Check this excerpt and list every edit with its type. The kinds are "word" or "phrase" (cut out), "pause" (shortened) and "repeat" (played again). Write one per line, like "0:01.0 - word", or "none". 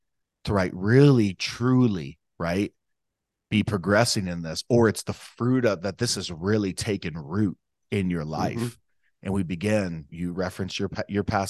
0:10.1 - word